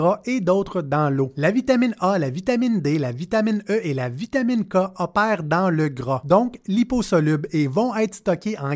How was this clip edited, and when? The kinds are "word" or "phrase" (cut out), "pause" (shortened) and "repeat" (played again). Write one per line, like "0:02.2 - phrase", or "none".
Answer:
none